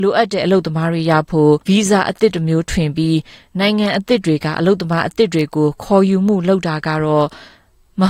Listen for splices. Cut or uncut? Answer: cut